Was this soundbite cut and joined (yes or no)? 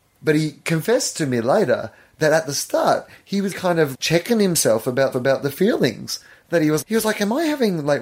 yes